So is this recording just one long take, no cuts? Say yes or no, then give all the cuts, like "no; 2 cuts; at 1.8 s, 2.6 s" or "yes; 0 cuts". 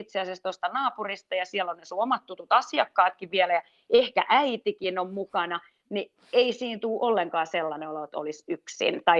yes; 0 cuts